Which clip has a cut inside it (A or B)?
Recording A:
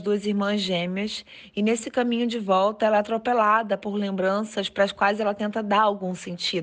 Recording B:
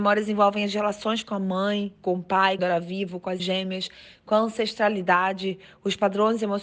B